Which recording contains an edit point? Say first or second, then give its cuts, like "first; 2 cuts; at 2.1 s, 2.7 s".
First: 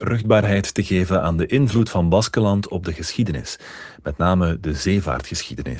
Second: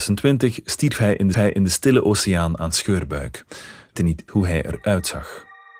second; 3 cuts; at 1.3 s, 4.0 s, 4.3 s